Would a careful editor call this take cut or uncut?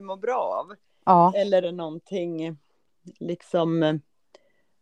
cut